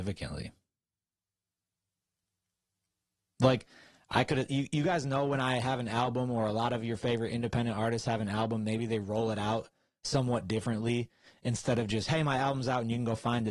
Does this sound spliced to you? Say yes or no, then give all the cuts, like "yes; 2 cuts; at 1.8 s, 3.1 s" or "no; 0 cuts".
no; 0 cuts